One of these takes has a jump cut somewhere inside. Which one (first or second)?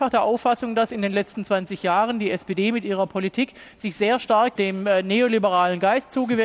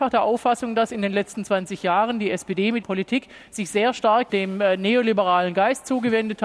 second